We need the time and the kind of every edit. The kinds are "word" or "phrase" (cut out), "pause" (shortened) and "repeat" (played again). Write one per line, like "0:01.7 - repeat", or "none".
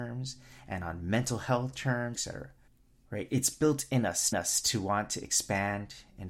0:02.1 - word
0:02.7 - pause
0:04.3 - repeat